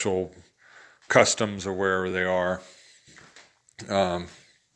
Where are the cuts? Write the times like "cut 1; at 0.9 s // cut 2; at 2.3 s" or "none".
none